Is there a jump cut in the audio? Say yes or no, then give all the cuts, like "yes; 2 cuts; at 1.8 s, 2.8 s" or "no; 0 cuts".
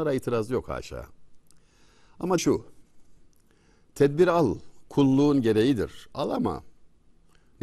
yes; 1 cut; at 2.4 s